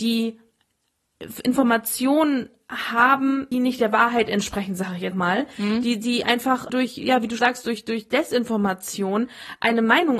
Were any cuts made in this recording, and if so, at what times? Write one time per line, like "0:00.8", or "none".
0:03.5
0:05.1
0:06.7
0:07.4